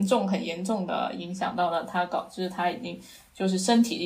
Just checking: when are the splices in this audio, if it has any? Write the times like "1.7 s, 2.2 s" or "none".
none